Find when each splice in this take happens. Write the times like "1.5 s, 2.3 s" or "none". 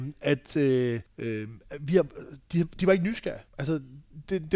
1.1 s, 3.5 s